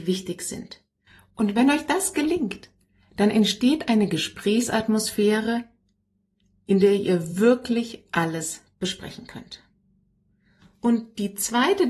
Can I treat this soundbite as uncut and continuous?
yes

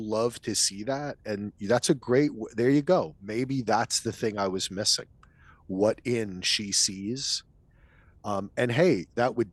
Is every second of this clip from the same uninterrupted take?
yes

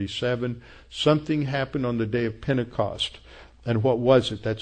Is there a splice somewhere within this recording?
no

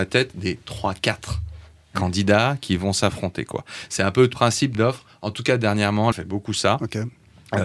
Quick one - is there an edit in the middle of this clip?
yes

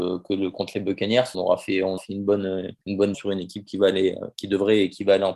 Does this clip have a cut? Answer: yes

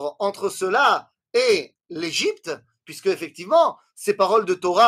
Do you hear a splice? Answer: no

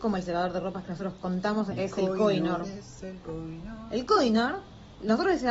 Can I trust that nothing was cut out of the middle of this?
no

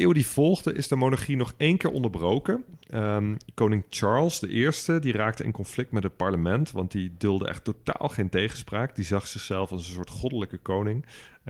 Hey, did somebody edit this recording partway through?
no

